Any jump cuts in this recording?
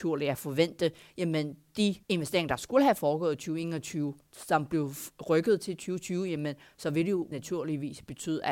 yes; 2 cuts; at 2.0 s, 7.3 s

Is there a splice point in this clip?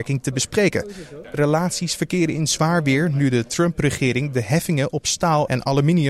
yes; 1 cut; at 1.3 s

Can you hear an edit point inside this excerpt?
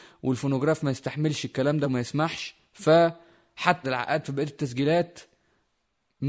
yes; 2 cuts; at 1.8 s, 3.8 s

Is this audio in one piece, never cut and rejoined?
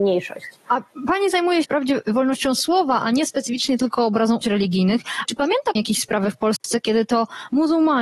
no; 4 cuts; at 1.6 s, 4.4 s, 5.2 s, 5.8 s

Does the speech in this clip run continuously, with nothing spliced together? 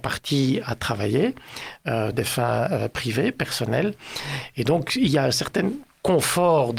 no; 1 cut; at 2.1 s

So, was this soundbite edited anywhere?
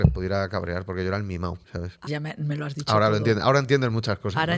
yes; 2 cuts; at 1.6 s, 2.1 s

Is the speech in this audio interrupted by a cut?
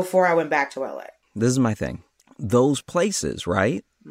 no; 0 cuts

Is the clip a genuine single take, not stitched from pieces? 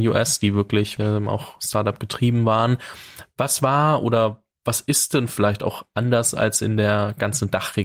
no; 1 cut; at 1.0 s

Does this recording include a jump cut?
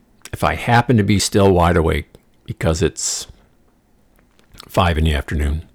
no; 0 cuts

